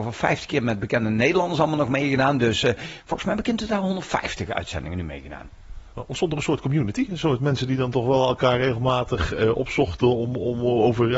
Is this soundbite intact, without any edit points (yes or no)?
yes